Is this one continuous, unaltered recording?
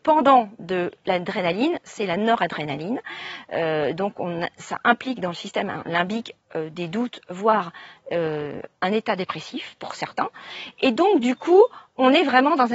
yes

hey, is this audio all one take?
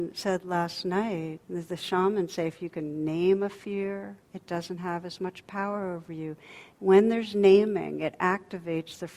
no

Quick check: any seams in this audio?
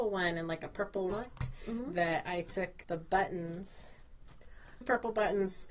yes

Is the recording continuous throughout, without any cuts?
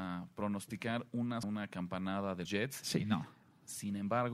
no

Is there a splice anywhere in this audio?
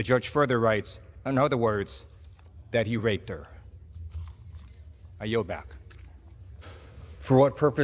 no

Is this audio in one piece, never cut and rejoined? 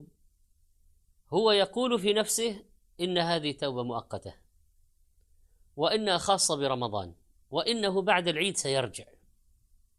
yes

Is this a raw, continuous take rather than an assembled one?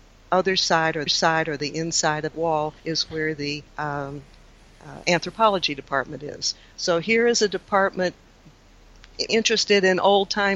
no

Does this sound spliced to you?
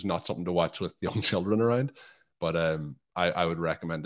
no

